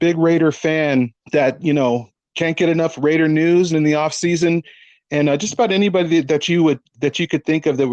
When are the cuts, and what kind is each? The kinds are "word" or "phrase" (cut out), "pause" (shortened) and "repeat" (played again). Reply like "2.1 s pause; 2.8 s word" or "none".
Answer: 1.2 s pause; 3.7 s word